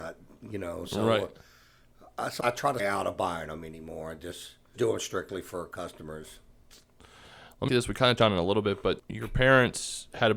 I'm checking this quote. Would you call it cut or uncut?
cut